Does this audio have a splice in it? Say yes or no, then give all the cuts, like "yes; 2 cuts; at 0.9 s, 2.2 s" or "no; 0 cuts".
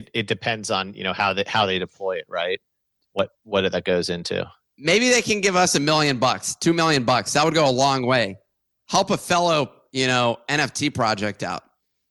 no; 0 cuts